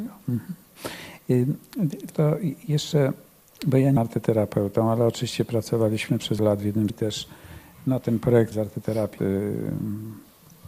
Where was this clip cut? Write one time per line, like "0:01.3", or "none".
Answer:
0:02.1
0:04.0
0:06.4
0:06.9
0:08.5
0:09.2